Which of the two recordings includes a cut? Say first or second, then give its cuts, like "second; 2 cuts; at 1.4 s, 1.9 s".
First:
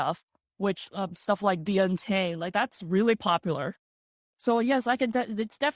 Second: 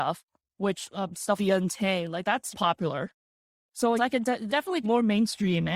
second; 5 cuts; at 1.4 s, 2.5 s, 4.0 s, 4.5 s, 4.8 s